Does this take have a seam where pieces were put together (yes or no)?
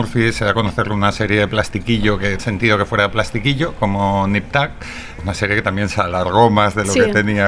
yes